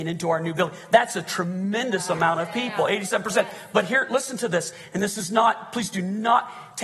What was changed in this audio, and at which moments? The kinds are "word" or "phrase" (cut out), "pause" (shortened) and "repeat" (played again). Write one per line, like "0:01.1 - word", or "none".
none